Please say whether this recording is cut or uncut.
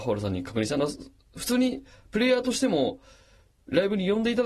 uncut